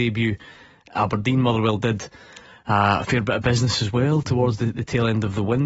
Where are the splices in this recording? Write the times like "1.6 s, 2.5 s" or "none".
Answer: none